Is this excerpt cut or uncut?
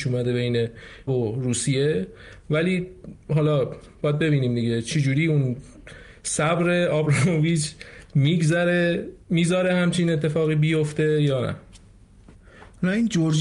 cut